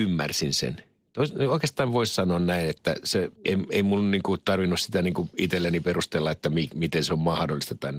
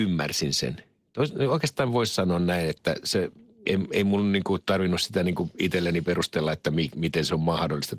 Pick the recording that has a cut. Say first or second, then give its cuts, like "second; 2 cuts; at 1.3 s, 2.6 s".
first; 1 cut; at 3.4 s